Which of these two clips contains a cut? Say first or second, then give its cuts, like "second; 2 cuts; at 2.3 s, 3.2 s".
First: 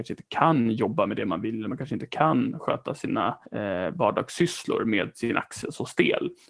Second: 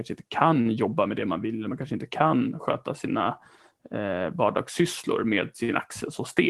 first; 1 cut; at 3.5 s